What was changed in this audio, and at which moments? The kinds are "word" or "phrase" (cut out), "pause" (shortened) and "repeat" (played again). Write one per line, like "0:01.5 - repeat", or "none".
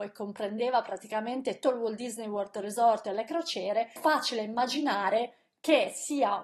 0:01.6 - word
0:04.0 - word